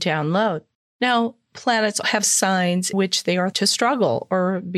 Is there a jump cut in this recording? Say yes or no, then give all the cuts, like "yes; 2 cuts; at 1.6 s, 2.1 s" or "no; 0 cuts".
yes; 3 cuts; at 2.0 s, 2.9 s, 3.5 s